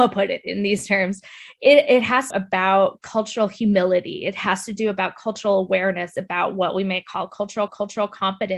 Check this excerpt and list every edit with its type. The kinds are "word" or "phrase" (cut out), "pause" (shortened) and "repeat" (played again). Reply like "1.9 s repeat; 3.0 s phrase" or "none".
2.3 s phrase; 7.7 s repeat